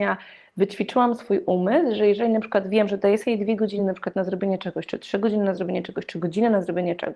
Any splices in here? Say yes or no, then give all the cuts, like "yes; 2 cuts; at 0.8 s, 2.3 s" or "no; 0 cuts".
no; 0 cuts